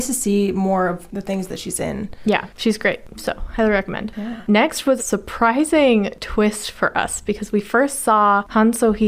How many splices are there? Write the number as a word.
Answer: one